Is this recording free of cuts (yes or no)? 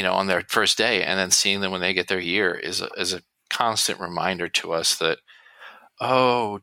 yes